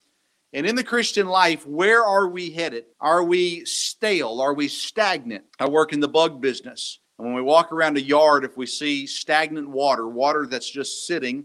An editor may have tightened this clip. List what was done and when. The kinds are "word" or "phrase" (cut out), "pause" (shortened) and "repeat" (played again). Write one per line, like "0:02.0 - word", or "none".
0:02.9 - pause
0:05.5 - pause
0:07.0 - pause